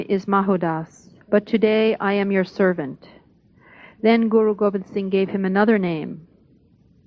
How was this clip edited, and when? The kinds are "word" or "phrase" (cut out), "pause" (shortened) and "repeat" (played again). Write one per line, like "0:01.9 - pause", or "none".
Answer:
0:01.2 - pause